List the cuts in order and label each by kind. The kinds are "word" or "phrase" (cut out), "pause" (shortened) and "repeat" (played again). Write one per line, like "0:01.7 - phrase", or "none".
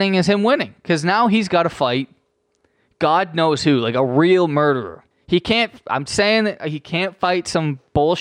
0:05.1 - pause